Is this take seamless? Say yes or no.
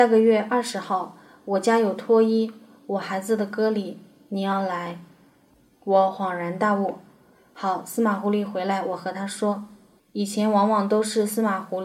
yes